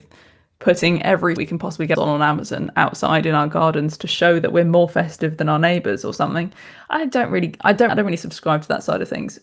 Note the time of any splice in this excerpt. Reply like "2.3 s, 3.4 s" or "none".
1.4 s, 1.9 s, 7.9 s